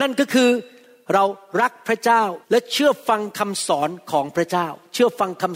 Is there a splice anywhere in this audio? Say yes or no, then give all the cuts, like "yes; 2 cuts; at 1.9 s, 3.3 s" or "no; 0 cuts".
yes; 1 cut; at 2.4 s